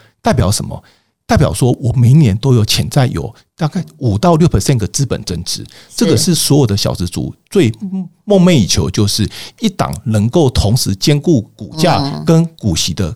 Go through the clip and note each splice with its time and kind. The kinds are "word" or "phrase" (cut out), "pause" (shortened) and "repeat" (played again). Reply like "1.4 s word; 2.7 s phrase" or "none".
none